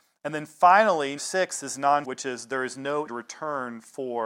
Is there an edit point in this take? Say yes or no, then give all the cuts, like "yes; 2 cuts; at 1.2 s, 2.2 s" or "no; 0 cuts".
yes; 3 cuts; at 1.2 s, 2.0 s, 3.1 s